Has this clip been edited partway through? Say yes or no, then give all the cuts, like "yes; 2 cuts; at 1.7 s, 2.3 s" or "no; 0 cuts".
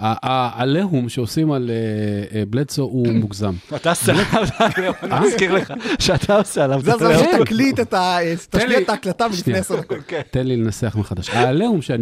no; 0 cuts